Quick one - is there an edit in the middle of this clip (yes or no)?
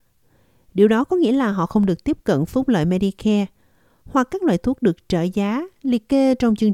no